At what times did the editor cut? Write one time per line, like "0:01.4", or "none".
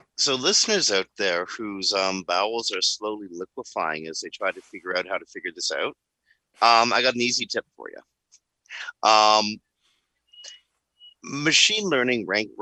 none